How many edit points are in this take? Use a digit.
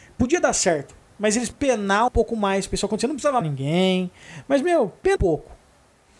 4